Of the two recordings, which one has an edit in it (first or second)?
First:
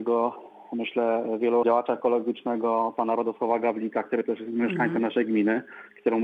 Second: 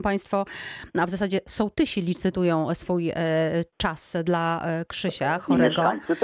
first